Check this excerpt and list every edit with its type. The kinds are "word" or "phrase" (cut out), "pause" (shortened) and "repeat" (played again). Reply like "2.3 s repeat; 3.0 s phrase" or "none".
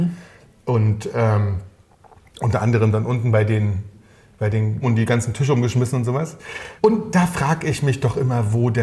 4.8 s word; 6.8 s pause